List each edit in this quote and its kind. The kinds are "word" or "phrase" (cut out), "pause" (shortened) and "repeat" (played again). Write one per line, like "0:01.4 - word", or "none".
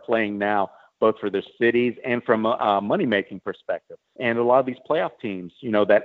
0:04.0 - pause

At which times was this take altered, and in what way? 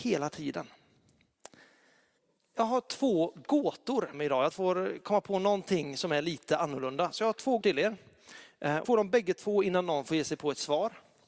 0:02.2 - pause
0:04.1 - word
0:04.5 - phrase
0:07.6 - word
0:08.8 - word

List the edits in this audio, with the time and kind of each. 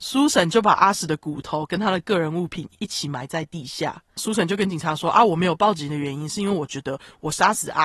0:04.1 - pause

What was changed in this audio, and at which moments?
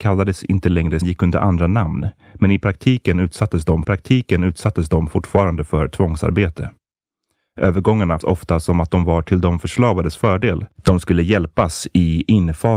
0:01.0 - phrase
0:03.8 - repeat
0:08.2 - word
0:10.7 - pause

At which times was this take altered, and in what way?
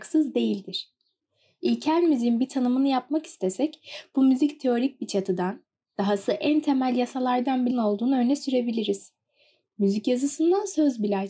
0:07.7 - word

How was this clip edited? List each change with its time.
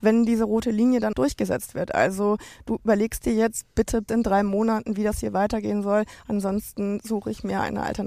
0:01.1 - word
0:04.1 - word

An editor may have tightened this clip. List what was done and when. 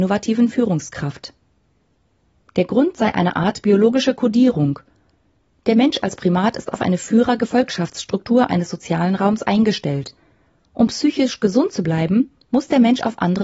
none

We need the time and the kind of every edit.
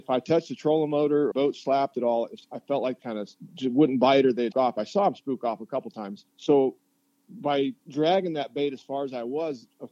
0:01.3 - phrase
0:03.0 - phrase
0:04.5 - word
0:06.3 - pause
0:07.8 - pause

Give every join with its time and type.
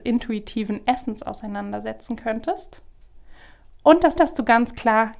0:04.2 - repeat

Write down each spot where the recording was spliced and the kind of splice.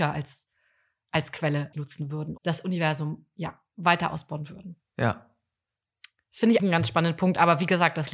0:01.7 - word
0:02.4 - word
0:06.6 - word

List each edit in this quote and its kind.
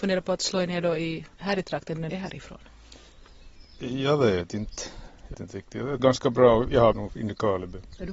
0:01.3 - pause
0:02.1 - phrase
0:05.3 - word
0:06.0 - word
0:06.9 - phrase

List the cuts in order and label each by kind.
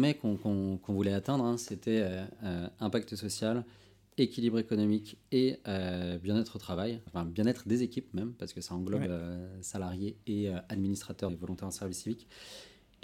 0:07.1 - word
0:11.3 - word

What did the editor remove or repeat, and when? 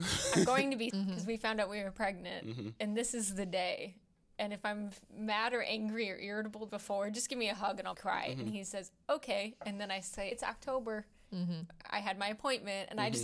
0:00.9 - word
0:06.7 - word
0:07.9 - word
0:10.3 - word

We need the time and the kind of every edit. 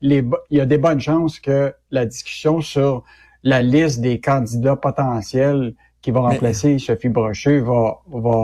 none

